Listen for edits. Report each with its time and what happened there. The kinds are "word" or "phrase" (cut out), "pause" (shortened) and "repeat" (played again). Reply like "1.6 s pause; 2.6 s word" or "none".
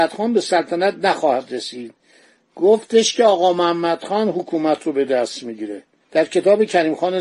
none